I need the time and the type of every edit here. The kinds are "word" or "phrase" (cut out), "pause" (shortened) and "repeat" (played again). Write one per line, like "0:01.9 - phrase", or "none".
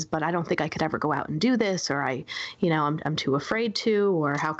none